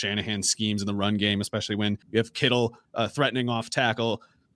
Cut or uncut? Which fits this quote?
cut